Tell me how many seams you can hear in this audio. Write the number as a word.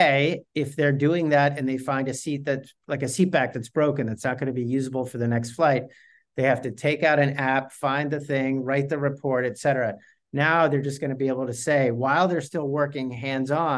zero